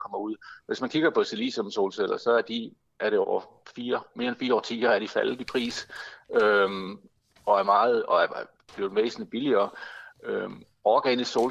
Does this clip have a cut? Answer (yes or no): no